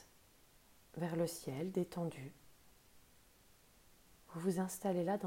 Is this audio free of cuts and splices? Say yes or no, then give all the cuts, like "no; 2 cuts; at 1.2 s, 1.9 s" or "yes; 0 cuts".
yes; 0 cuts